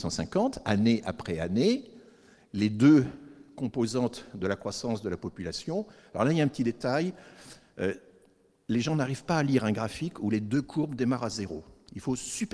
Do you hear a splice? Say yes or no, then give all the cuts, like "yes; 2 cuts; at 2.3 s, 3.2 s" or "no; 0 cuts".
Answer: no; 0 cuts